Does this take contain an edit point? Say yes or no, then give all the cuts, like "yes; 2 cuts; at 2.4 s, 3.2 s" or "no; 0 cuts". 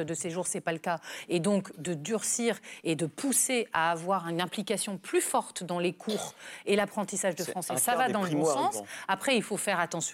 no; 0 cuts